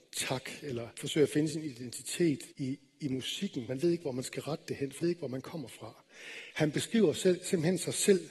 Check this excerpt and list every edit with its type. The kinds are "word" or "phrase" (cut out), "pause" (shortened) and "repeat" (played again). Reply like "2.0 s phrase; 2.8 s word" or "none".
0.9 s pause; 2.5 s pause; 3.7 s word; 5.0 s word